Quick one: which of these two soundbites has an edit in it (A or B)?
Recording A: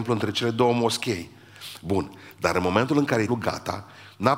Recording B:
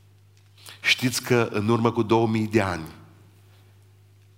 A